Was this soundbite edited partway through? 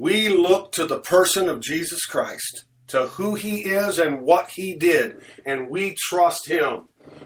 no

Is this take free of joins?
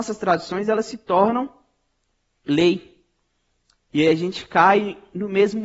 yes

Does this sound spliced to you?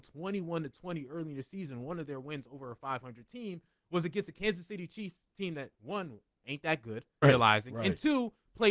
yes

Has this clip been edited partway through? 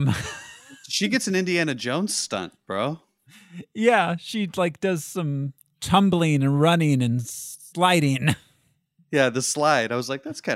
no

